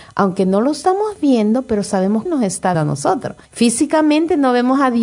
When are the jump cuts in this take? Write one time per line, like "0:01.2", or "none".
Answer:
0:02.3
0:02.7
0:03.4